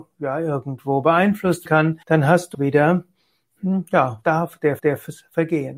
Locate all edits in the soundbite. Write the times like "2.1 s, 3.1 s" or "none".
1.7 s, 2.0 s, 2.5 s, 4.2 s, 4.8 s